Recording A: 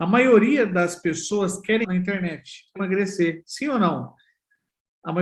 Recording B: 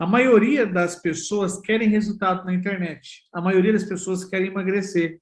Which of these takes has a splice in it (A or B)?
A